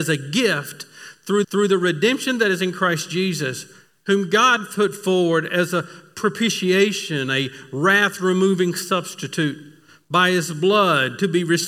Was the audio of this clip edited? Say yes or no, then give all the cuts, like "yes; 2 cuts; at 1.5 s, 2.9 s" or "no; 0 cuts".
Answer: yes; 1 cut; at 1.4 s